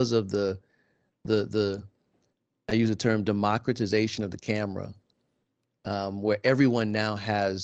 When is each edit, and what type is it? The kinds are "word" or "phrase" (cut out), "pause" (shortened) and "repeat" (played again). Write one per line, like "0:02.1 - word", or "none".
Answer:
none